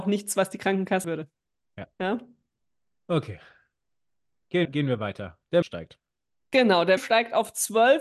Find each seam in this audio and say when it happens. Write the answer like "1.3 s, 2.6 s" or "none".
1.0 s, 1.9 s, 4.6 s, 5.6 s, 7.0 s